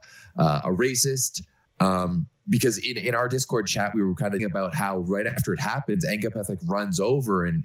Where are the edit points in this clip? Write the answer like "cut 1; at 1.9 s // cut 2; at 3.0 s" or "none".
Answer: cut 1; at 1.6 s // cut 2; at 4.4 s